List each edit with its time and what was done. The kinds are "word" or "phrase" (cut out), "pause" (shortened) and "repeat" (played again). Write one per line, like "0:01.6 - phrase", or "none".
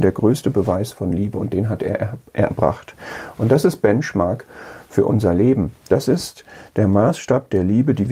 none